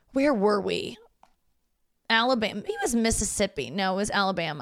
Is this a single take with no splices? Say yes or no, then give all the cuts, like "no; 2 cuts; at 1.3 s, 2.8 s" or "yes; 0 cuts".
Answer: no; 1 cut; at 2.7 s